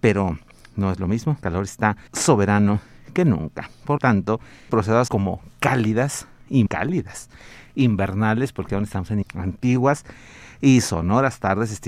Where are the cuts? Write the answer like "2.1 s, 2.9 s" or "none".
1.4 s, 2.1 s, 4.0 s, 4.7 s, 5.1 s, 6.7 s, 8.7 s, 9.2 s

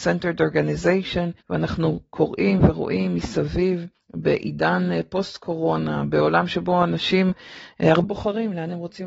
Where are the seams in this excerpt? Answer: 1.4 s, 3.9 s, 8.0 s

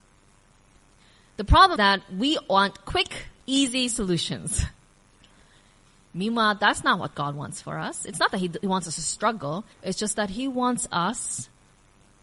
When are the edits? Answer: 1.8 s, 3.4 s, 9.7 s

